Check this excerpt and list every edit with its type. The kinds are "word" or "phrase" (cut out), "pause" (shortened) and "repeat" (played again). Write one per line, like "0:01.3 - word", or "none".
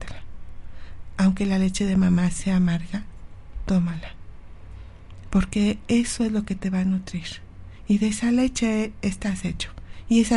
none